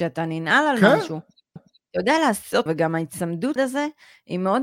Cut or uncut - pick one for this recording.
cut